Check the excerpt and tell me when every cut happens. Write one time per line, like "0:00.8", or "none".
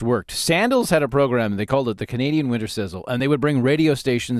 none